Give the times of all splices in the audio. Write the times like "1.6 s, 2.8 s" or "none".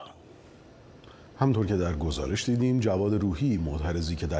none